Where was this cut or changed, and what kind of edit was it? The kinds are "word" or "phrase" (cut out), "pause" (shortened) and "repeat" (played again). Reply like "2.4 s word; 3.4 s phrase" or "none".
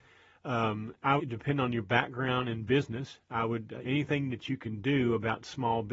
1.2 s phrase; 3.8 s phrase